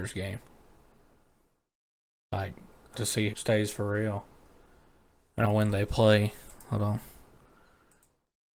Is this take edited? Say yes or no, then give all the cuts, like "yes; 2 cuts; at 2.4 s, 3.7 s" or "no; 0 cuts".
yes; 3 cuts; at 2.9 s, 3.3 s, 5.4 s